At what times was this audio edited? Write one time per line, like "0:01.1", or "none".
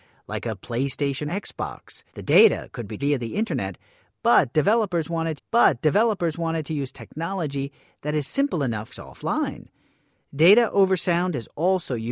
0:01.3
0:02.1
0:03.0
0:05.4
0:08.9